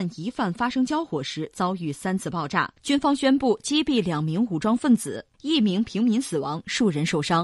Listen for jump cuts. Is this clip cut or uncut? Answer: cut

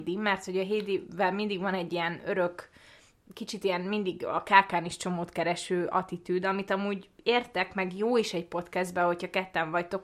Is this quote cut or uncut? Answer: uncut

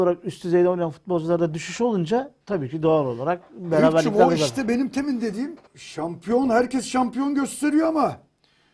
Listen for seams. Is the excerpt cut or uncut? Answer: cut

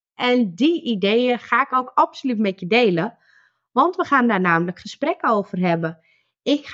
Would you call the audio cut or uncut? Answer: uncut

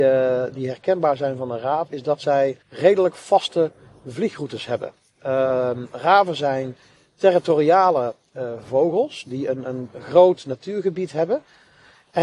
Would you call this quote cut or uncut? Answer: cut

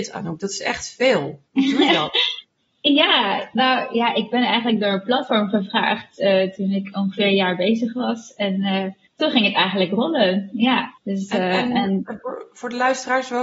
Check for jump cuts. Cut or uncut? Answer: cut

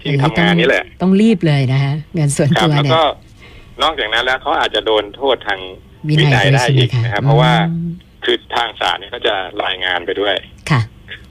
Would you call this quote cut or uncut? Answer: cut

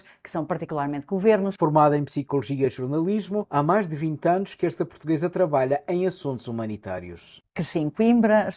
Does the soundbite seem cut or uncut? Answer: uncut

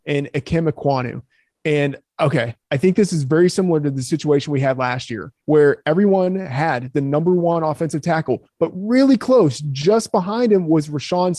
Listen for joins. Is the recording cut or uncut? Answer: cut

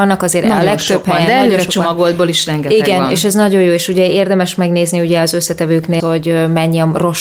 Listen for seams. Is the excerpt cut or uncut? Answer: cut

